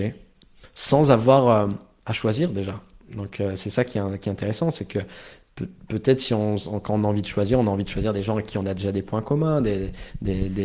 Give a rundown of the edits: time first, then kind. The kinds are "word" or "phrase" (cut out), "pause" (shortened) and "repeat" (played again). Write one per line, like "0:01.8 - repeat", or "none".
none